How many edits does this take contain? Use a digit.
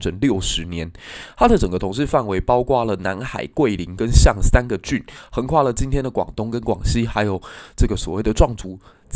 0